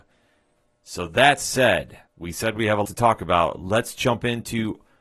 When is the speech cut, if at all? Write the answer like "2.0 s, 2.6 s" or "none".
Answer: 2.1 s, 2.8 s

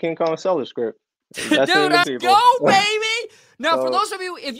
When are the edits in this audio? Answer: 1.2 s, 2.0 s

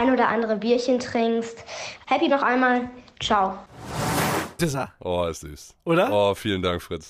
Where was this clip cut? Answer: 2.3 s, 4.6 s, 5.4 s

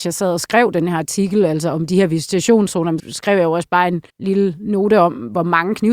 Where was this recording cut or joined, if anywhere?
3.0 s, 4.1 s

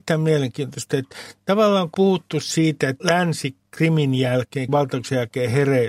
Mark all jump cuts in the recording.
1.9 s, 3.0 s, 4.7 s

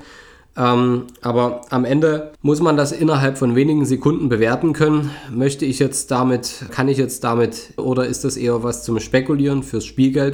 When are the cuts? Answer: 2.4 s, 6.7 s, 7.8 s

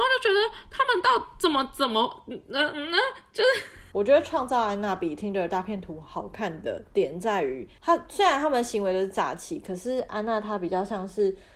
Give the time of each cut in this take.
none

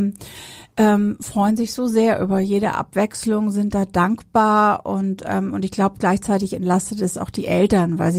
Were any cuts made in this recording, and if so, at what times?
none

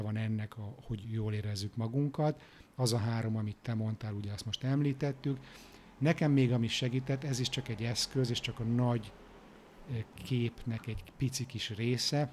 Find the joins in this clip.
none

